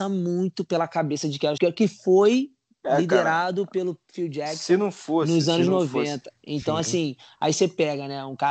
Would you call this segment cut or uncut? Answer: cut